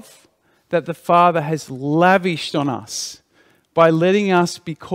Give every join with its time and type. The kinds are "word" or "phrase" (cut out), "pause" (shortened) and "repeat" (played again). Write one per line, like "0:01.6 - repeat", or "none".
none

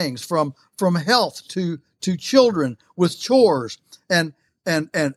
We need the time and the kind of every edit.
none

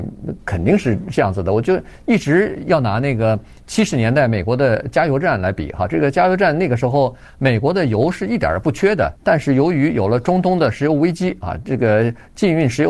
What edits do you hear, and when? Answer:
0:09.2 - pause

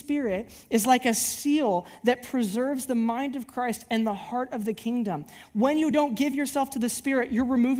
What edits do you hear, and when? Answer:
none

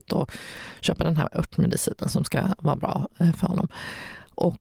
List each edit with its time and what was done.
none

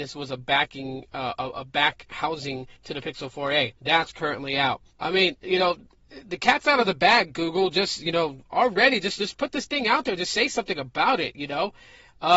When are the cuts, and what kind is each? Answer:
0:02.8 - pause
0:03.8 - pause
0:04.9 - pause

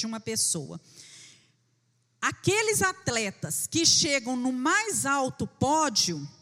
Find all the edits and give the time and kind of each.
none

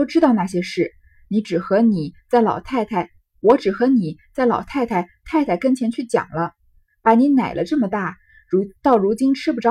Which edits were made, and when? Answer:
none

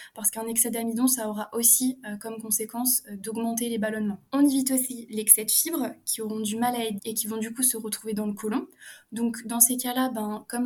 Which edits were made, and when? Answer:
0:04.3 - pause
0:07.0 - word

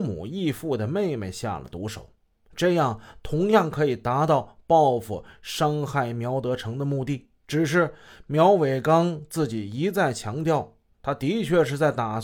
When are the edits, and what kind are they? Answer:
0:07.4 - pause

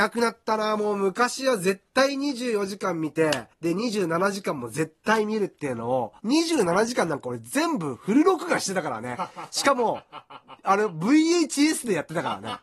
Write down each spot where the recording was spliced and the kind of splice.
0:03.5 - pause
0:06.2 - pause

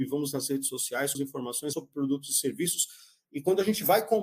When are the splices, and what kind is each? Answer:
0:01.1 - word
0:01.7 - word

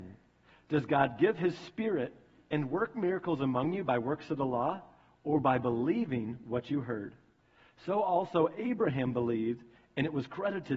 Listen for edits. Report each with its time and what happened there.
none

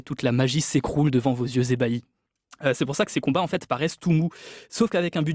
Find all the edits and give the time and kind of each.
none

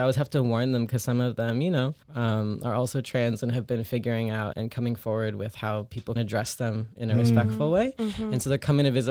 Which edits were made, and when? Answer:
0:02.0 - pause
0:04.5 - word
0:06.2 - word

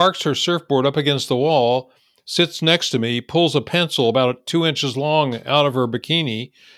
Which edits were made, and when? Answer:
none

